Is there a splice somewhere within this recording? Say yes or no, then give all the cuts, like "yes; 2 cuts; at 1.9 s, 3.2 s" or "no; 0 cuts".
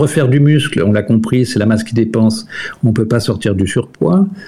no; 0 cuts